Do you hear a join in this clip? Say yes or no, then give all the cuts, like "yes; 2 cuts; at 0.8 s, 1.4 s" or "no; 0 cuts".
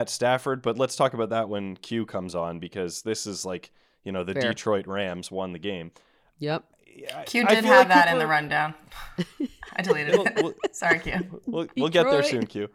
no; 0 cuts